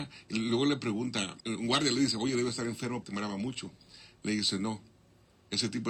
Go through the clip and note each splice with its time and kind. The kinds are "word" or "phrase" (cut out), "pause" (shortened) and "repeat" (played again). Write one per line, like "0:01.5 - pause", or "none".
0:01.4 - pause
0:03.0 - word

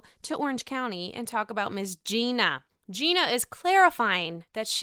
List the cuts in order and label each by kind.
none

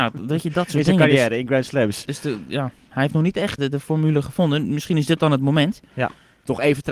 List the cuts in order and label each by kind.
0:03.6 - word

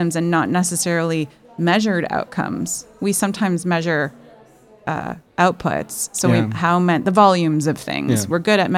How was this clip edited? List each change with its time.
none

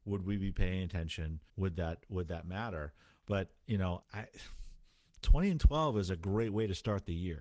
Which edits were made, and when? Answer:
0:01.5 - pause
0:04.0 - phrase

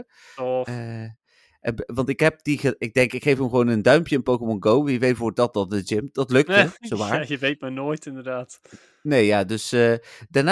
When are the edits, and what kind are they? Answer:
none

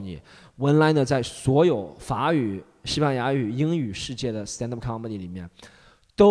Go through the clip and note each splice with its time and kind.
none

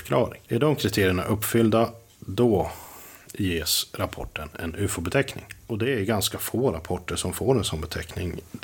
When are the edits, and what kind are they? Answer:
0:05.6 - pause

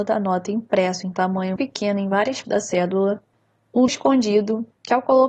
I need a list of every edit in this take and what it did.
0:01.6 - word
0:02.4 - word
0:03.9 - word

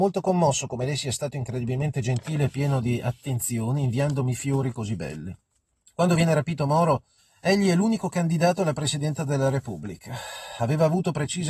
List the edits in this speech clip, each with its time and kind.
0:05.7 - pause
0:07.2 - pause

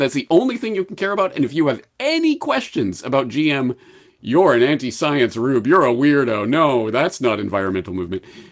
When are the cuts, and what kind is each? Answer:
none

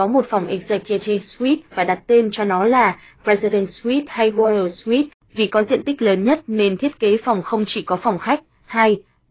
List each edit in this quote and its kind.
none

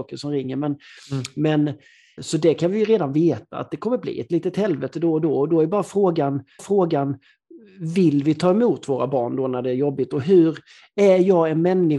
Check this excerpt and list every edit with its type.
0:02.2 - word
0:06.6 - repeat

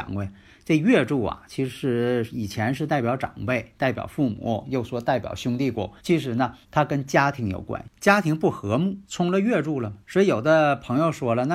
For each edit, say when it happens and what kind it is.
0:06.0 - pause
0:06.6 - pause
0:07.9 - pause
0:09.0 - pause
0:10.0 - pause

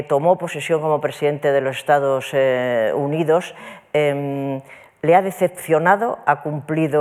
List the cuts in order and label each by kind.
none

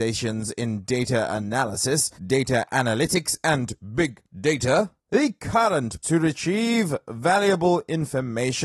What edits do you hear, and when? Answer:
0:02.2 - pause
0:05.0 - pause
0:06.0 - word

